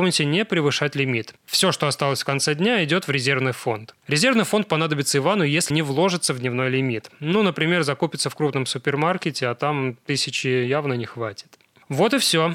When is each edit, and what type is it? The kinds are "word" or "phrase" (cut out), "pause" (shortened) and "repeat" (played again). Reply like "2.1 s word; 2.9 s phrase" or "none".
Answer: 1.4 s pause; 5.7 s word

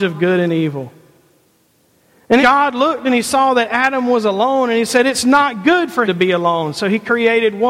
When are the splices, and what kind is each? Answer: 2.4 s word; 6.1 s word

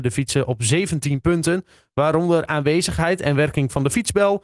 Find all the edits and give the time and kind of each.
none

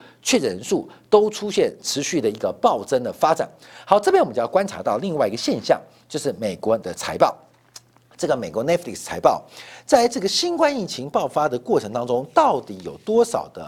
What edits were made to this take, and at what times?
6.8 s word

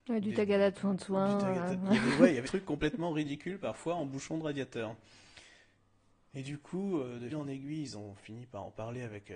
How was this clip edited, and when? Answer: 2.5 s word; 7.3 s word

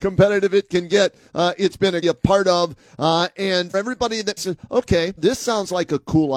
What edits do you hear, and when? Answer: 2.0 s phrase; 3.7 s word; 4.4 s word; 5.2 s word

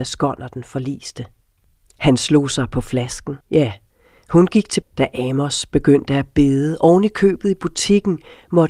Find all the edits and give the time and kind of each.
3.4 s pause; 4.8 s word

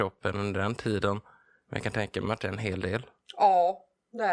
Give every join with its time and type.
none

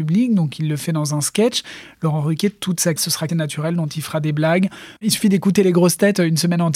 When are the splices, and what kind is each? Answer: 3.0 s word; 3.3 s phrase; 5.0 s pause

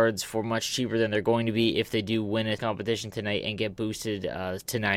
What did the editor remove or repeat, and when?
2.6 s word

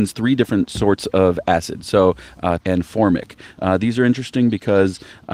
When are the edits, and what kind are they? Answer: 2.6 s phrase

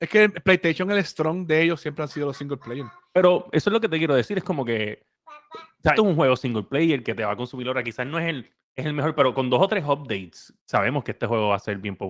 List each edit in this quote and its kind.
5.2 s pause; 5.9 s word; 10.6 s pause

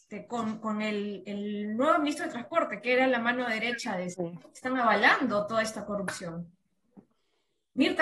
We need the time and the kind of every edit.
4.1 s word

